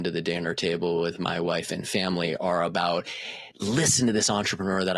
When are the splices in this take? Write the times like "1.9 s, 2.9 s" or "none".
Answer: 3.5 s